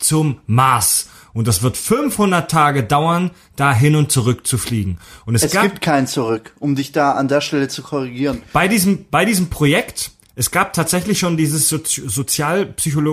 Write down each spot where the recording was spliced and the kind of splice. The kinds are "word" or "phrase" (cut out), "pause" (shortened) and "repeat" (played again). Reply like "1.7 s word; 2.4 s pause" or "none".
none